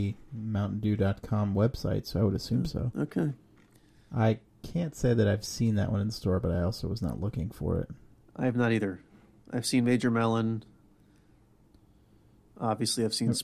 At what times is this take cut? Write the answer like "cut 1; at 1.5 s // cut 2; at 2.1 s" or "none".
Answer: none